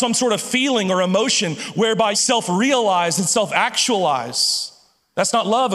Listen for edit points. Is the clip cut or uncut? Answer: cut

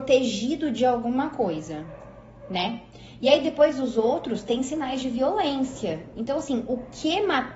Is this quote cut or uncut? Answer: uncut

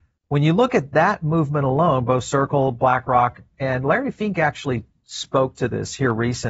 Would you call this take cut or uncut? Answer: uncut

